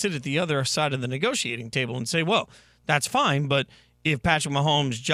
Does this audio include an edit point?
no; 0 cuts

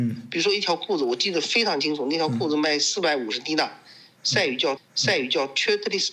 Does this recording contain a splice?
yes; 1 cut; at 4.8 s

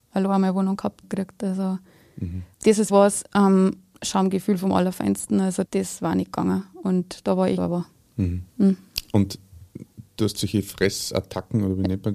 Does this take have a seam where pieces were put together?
yes; 7 cuts; at 1.0 s, 2.5 s, 2.9 s, 3.9 s, 5.6 s, 7.6 s, 8.5 s

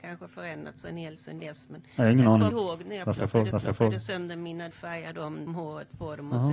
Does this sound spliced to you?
yes; 5 cuts; at 1.2 s, 2.5 s, 3.5 s, 4.7 s, 5.5 s

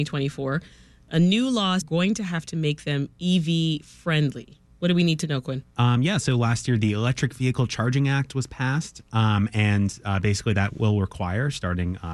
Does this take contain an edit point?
yes; 1 cut; at 1.8 s

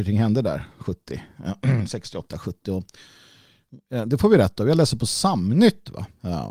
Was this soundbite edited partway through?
no; 0 cuts

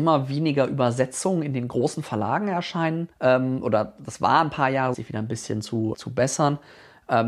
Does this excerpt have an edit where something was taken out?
yes; 3 cuts; at 3.1 s, 4.9 s, 5.9 s

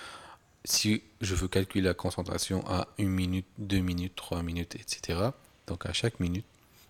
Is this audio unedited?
yes; 0 cuts

